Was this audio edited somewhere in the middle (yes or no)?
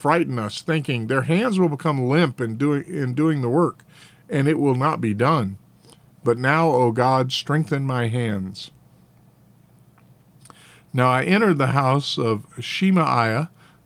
no